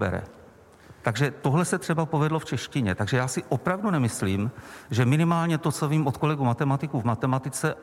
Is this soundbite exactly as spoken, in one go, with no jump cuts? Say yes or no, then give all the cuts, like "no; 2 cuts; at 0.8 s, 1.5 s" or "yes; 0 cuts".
yes; 0 cuts